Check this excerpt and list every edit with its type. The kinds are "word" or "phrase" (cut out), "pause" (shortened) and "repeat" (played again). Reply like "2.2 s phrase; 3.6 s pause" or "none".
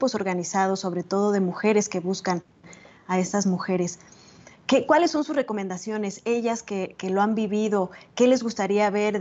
none